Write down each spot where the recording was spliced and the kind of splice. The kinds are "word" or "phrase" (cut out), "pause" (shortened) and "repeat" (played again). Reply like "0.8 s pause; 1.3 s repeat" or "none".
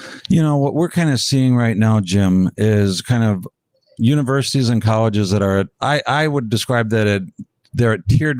5.7 s pause